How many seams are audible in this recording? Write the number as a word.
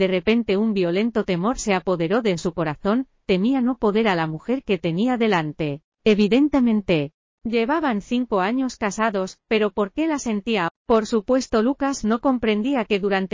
three